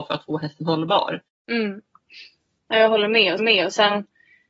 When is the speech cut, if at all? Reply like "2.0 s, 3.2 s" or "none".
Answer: 1.3 s, 3.4 s